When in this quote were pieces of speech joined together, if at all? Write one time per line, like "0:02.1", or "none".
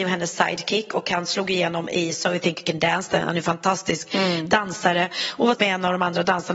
0:05.6